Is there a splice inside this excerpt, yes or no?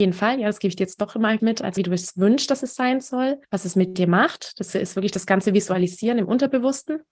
yes